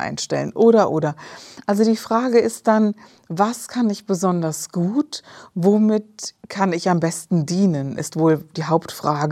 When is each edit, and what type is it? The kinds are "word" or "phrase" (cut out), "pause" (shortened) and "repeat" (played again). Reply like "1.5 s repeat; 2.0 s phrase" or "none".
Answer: none